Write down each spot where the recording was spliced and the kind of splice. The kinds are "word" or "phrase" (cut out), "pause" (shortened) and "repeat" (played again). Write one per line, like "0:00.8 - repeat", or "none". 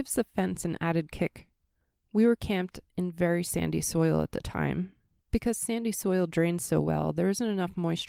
none